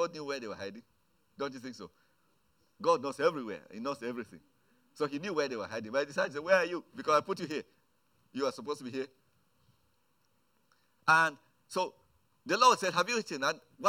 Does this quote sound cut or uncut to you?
uncut